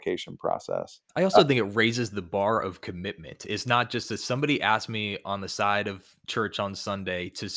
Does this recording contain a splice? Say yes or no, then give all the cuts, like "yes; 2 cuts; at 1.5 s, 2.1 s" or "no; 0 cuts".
yes; 1 cut; at 1.1 s